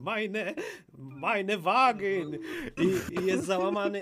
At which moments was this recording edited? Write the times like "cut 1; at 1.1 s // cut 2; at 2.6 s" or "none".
none